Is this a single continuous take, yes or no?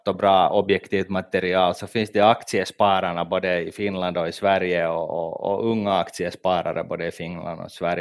yes